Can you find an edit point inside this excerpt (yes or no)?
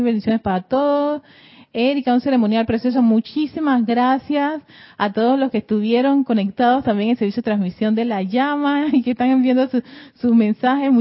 no